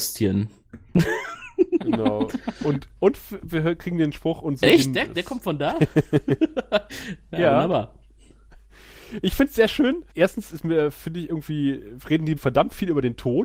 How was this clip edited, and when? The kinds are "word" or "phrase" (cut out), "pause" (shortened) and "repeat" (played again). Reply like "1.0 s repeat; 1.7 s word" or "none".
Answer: 3.0 s pause; 4.6 s word; 10.1 s pause; 12.4 s word